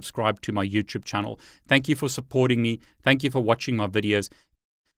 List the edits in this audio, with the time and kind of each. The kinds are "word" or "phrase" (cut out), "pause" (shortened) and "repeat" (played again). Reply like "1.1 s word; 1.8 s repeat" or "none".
none